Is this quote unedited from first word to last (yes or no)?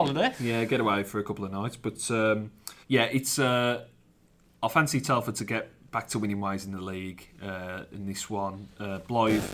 no